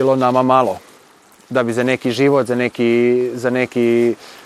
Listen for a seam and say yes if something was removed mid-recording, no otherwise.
no